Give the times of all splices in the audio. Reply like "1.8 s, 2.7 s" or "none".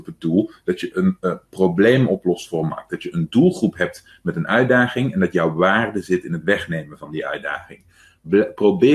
none